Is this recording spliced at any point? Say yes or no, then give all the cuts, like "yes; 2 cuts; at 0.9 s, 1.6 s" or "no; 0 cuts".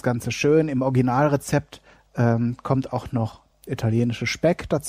yes; 1 cut; at 3.5 s